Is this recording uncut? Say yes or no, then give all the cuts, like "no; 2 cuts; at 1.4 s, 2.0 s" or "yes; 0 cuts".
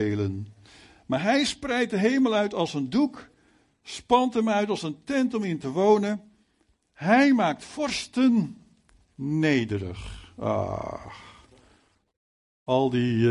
yes; 0 cuts